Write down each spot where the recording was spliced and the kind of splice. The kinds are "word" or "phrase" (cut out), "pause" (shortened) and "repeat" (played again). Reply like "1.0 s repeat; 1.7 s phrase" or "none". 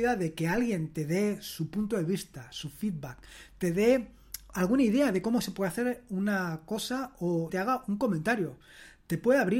7.5 s word